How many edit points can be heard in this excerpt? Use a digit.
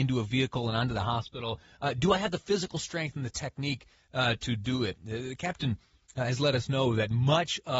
0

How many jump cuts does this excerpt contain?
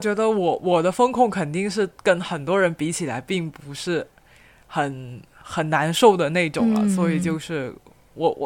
0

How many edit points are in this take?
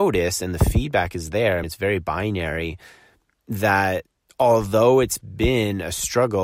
2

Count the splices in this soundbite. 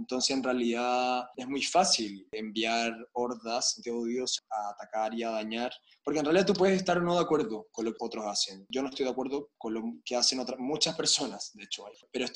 3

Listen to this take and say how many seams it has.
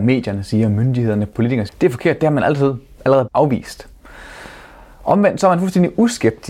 2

